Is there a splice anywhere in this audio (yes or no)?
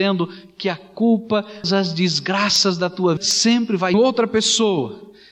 yes